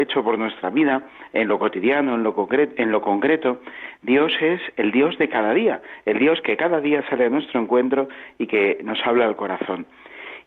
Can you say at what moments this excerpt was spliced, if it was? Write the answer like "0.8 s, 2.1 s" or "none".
none